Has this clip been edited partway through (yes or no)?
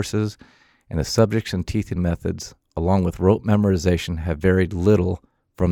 no